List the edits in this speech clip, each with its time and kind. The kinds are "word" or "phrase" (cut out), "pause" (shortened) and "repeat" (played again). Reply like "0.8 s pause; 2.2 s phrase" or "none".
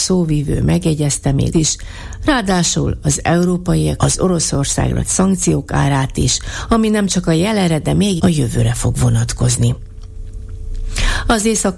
1.5 s word; 4.0 s phrase; 5.0 s word; 8.2 s word